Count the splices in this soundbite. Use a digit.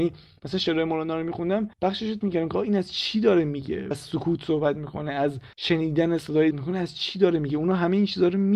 5